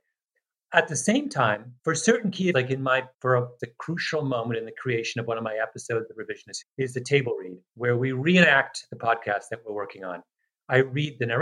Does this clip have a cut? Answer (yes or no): yes